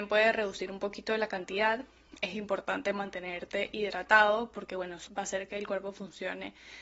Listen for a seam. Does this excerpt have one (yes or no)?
yes